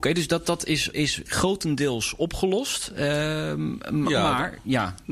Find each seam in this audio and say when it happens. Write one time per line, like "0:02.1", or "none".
0:00.9
0:01.3